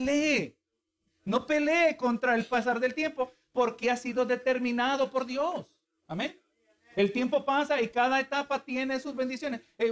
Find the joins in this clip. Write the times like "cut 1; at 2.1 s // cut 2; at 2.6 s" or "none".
cut 1; at 3.8 s